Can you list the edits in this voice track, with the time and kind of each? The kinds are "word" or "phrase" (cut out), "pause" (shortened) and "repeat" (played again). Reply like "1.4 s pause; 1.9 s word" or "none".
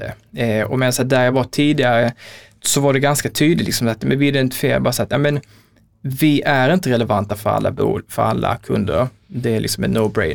none